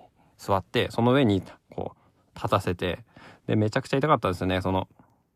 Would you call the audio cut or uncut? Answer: uncut